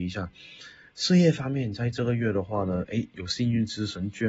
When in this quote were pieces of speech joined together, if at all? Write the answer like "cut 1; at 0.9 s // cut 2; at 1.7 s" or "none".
none